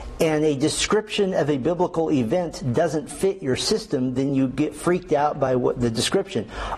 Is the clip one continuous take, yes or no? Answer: yes